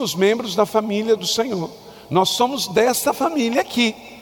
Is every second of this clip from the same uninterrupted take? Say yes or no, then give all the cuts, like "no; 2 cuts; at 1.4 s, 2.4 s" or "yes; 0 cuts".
yes; 0 cuts